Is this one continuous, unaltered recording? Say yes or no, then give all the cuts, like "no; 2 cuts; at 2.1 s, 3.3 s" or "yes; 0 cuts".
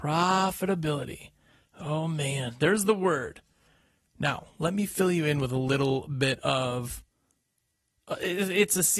yes; 0 cuts